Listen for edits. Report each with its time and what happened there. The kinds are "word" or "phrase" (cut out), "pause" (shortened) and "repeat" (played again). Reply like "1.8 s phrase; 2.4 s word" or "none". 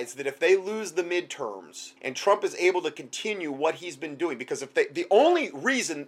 2.0 s pause